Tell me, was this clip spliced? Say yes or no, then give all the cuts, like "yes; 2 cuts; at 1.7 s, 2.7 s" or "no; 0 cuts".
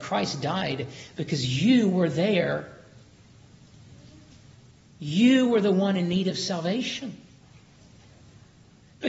no; 0 cuts